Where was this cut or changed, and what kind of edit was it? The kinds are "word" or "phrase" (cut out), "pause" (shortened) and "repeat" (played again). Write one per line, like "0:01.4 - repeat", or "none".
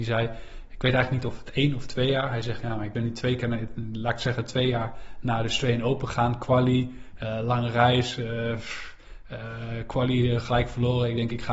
none